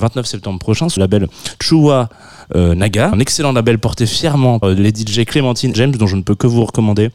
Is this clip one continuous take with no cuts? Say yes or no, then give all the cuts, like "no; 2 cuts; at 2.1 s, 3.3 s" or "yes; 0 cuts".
no; 4 cuts; at 1.0 s, 3.1 s, 4.6 s, 5.7 s